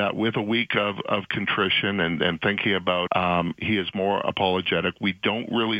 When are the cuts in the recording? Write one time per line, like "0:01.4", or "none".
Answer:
0:03.1